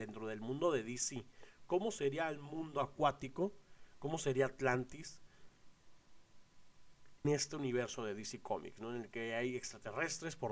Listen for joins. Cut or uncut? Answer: cut